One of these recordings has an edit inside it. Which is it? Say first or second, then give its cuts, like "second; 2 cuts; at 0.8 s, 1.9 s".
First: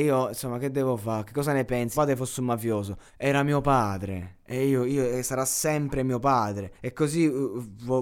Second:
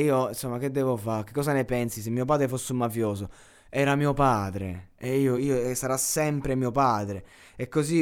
first; 3 cuts; at 1.9 s, 3.1 s, 6.7 s